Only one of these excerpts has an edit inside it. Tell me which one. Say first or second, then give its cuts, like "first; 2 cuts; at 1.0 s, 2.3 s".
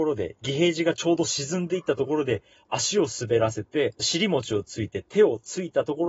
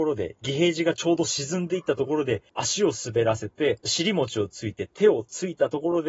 second; 1 cut; at 2.5 s